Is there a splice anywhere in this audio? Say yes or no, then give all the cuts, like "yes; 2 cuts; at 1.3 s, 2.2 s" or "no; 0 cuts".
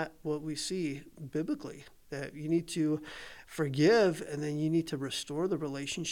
no; 0 cuts